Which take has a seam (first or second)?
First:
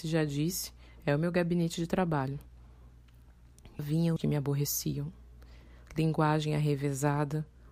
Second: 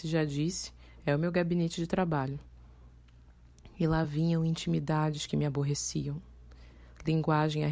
first